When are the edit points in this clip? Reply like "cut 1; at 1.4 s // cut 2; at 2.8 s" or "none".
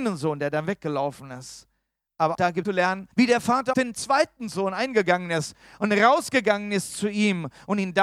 cut 1; at 2.3 s // cut 2; at 2.6 s // cut 3; at 3.1 s // cut 4; at 3.7 s